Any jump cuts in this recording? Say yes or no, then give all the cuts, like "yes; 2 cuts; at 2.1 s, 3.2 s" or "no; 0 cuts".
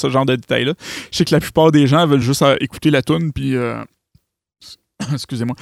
no; 0 cuts